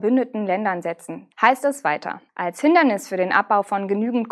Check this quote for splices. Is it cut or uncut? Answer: cut